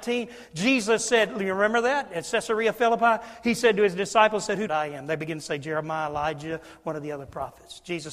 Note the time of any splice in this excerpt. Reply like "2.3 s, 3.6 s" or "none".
4.7 s